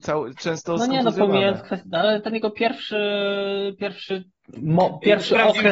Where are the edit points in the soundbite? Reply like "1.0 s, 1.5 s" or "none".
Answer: none